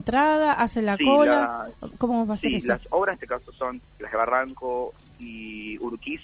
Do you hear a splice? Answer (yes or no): yes